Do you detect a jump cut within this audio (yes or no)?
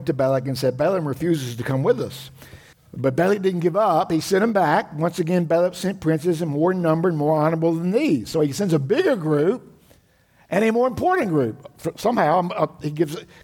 yes